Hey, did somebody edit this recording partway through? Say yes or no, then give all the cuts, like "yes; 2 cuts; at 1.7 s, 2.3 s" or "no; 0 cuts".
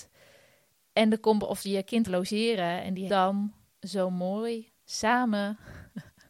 yes; 4 cuts; at 2.1 s, 3.1 s, 3.7 s, 4.8 s